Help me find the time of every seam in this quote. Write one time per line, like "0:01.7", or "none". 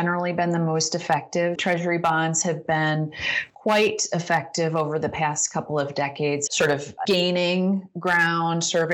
0:01.6
0:06.5
0:07.0